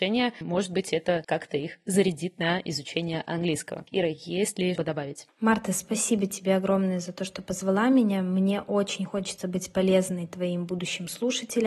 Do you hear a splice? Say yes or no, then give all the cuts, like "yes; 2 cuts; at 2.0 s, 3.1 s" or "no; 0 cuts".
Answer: yes; 1 cut; at 4.8 s